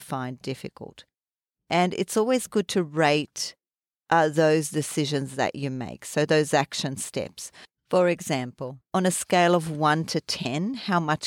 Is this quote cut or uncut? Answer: uncut